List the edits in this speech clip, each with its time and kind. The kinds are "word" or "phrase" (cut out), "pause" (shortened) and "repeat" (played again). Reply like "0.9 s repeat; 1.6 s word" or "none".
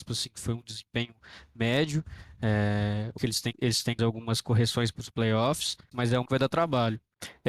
3.2 s word; 3.5 s word; 4.0 s word; 4.9 s word; 5.9 s word; 6.3 s word